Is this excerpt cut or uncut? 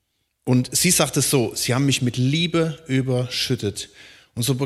uncut